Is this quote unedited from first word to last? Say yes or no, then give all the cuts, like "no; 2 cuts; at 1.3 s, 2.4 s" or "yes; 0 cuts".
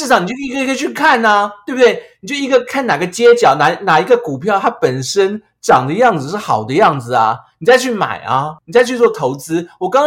yes; 0 cuts